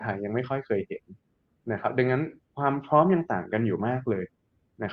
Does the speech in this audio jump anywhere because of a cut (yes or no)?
no